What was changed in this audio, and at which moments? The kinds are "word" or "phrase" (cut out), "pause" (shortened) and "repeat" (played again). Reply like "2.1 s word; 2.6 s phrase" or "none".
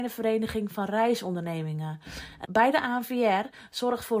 2.4 s word